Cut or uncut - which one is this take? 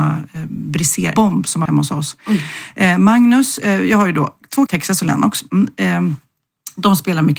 cut